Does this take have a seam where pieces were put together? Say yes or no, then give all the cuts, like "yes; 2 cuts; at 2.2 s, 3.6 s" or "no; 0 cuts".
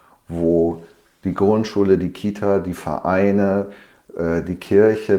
no; 0 cuts